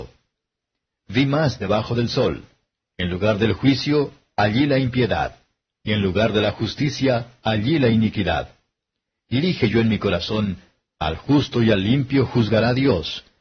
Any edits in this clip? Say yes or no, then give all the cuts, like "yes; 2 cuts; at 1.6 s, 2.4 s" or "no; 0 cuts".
no; 0 cuts